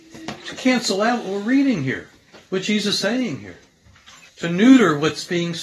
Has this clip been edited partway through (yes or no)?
yes